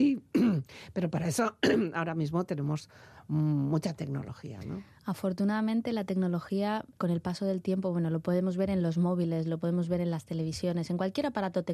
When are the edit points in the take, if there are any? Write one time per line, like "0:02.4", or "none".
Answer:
0:07.0

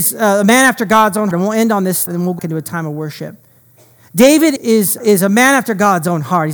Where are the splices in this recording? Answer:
0:01.3
0:02.1
0:02.4
0:04.6
0:05.0

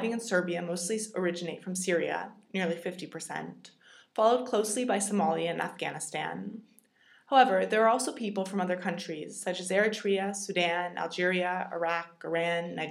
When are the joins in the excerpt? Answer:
none

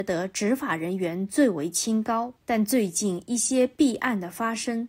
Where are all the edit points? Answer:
0:02.4

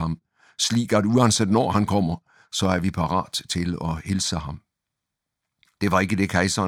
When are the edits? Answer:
none

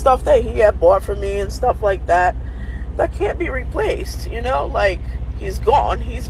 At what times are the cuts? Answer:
none

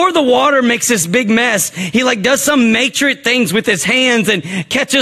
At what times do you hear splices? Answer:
none

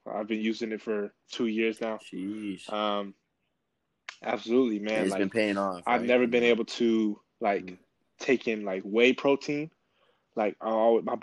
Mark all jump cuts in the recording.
none

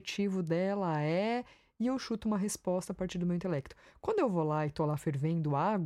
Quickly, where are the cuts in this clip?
none

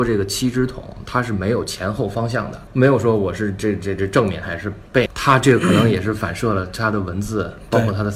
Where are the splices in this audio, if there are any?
0:02.7
0:05.1

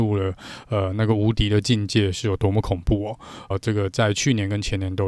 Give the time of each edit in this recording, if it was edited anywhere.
0:03.5

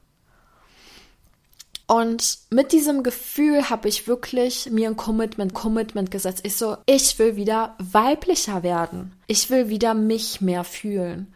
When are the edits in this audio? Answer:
0:01.8
0:05.5
0:06.8
0:09.2

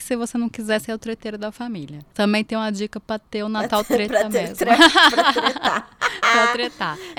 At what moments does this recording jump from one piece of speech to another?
none

